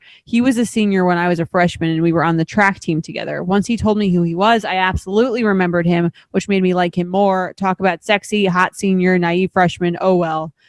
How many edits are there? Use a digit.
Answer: 0